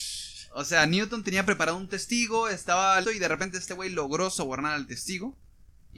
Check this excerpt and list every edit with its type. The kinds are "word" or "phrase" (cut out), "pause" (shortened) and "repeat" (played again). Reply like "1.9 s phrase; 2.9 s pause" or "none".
3.0 s word